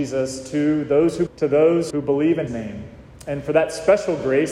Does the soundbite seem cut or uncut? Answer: cut